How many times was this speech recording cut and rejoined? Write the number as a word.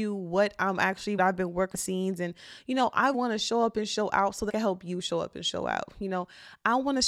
four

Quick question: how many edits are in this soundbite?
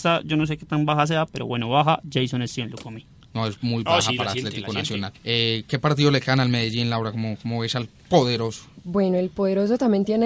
one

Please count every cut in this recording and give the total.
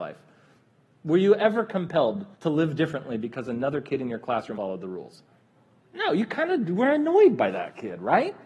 three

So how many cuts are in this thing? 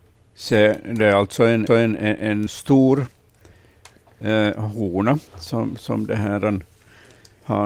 three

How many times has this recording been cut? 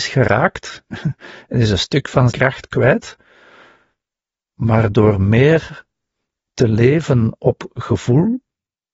one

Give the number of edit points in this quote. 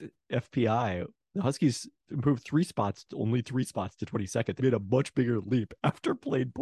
one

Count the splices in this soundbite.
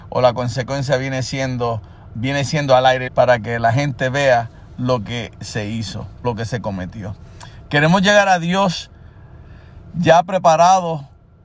three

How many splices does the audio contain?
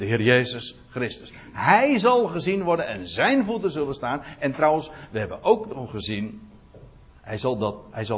zero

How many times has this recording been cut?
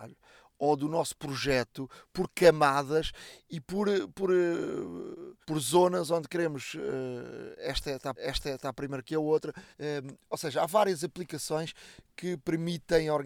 three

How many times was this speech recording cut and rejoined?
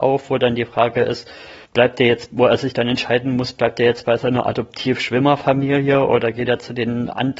one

